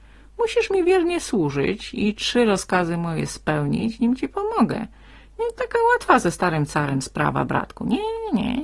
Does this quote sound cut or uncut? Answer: uncut